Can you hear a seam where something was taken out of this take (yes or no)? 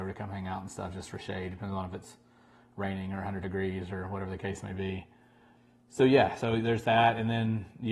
no